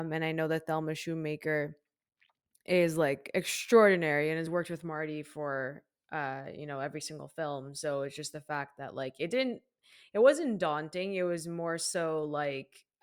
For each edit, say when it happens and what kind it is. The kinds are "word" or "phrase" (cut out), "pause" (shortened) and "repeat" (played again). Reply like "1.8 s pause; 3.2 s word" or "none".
none